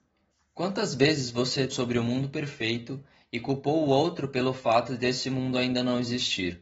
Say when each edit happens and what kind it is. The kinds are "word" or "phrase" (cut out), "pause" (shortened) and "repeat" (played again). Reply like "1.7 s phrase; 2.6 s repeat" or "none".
1.7 s word